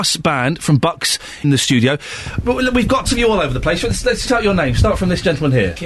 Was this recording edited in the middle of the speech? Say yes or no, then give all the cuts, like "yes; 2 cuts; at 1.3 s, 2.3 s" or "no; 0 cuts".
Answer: yes; 3 cuts; at 1.4 s, 3.0 s, 4.3 s